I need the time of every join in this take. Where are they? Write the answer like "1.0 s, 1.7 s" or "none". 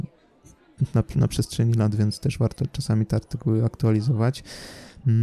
none